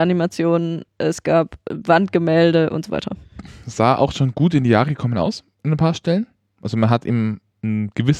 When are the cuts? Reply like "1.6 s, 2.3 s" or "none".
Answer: none